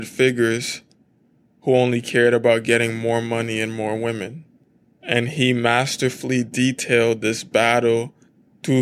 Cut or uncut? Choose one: uncut